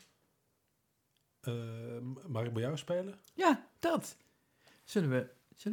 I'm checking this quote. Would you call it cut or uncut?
uncut